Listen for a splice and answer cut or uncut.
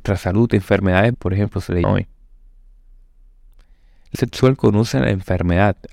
cut